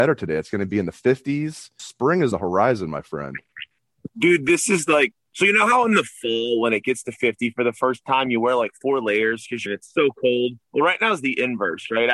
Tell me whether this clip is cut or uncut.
cut